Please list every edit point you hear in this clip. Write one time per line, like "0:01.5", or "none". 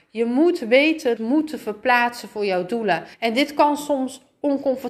0:01.2
0:03.1